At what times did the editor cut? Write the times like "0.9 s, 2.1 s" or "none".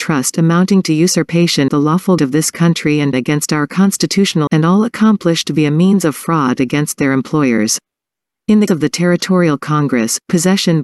1.7 s, 2.2 s, 3.1 s, 4.5 s, 8.7 s